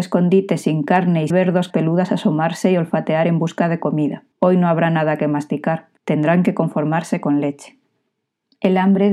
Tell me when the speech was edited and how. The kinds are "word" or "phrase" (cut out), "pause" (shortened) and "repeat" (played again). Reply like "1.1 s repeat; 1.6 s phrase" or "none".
1.3 s phrase; 1.7 s word; 4.3 s pause; 6.0 s pause